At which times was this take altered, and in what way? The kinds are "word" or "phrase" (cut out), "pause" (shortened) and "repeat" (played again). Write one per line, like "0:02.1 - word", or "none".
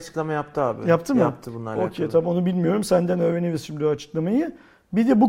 none